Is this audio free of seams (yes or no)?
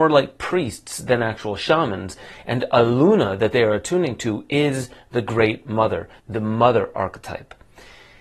yes